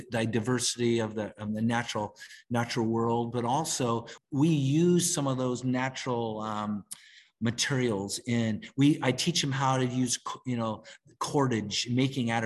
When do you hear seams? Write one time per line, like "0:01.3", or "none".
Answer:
none